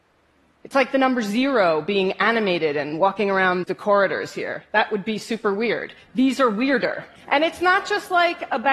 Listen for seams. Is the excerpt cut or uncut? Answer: cut